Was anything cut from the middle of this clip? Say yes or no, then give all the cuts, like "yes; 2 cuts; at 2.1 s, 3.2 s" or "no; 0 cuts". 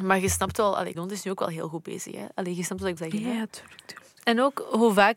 yes; 2 cuts; at 0.9 s, 3.0 s